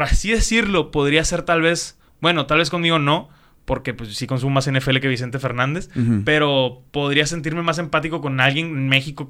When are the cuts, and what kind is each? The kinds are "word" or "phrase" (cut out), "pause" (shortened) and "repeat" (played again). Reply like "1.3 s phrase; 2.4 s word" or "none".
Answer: none